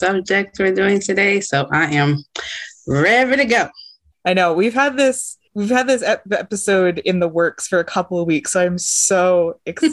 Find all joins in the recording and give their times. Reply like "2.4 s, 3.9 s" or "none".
4.1 s, 5.5 s